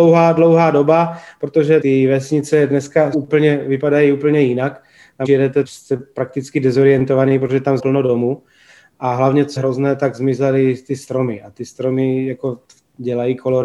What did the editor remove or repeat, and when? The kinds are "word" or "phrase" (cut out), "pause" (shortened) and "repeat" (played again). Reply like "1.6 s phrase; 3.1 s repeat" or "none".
1.8 s word; 3.1 s word; 5.2 s word; 5.6 s word; 7.8 s word; 9.6 s word